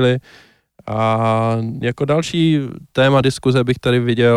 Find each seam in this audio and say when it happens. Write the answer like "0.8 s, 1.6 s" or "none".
none